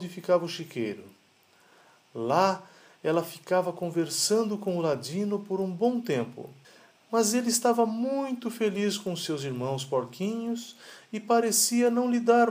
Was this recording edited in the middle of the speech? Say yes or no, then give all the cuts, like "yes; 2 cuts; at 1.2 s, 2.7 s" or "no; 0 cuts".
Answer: yes; 1 cut; at 6.6 s